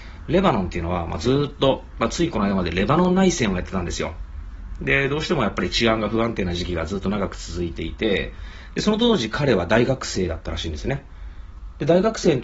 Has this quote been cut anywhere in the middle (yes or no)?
no